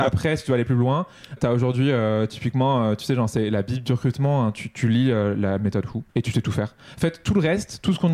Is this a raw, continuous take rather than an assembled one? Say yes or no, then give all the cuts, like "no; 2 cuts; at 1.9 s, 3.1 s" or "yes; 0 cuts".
no; 2 cuts; at 1.4 s, 6.1 s